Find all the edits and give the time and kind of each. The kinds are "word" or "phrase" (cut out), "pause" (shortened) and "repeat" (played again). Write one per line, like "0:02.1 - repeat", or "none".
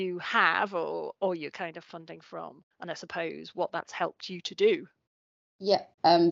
0:01.5 - phrase